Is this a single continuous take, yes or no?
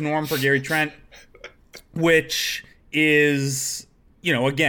yes